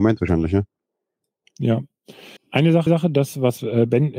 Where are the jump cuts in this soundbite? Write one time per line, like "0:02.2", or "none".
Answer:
0:02.4
0:02.9